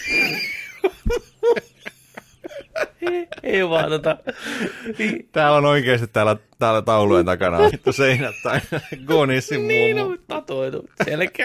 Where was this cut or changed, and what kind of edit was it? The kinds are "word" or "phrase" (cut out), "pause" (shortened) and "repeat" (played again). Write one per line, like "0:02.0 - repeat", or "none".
0:07.7 - phrase